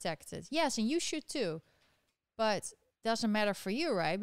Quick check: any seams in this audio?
yes; 1 cut; at 3.0 s

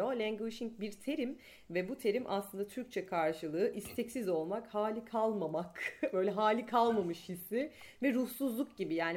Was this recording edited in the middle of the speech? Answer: no; 0 cuts

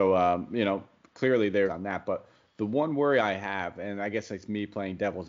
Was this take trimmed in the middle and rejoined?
yes; 1 cut; at 1.7 s

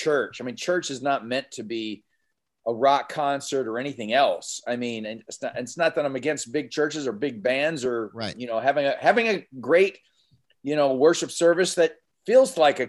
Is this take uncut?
yes; 0 cuts

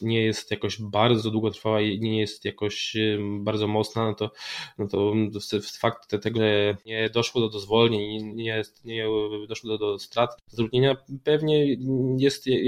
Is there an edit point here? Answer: yes; 3 cuts; at 6.3 s, 8.3 s, 9.8 s

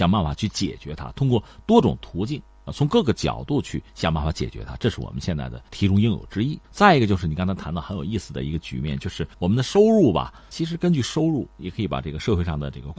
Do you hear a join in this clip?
yes; 5 cuts; at 3.9 s, 5.7 s, 6.6 s, 9.3 s, 10.5 s

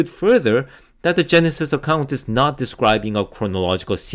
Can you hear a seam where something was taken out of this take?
no; 0 cuts

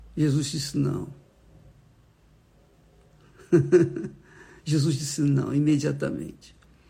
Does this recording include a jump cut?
no; 0 cuts

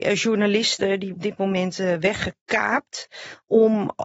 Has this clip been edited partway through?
yes; 1 cut; at 1.1 s

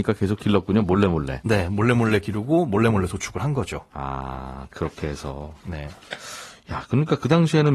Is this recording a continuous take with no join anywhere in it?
yes; 0 cuts

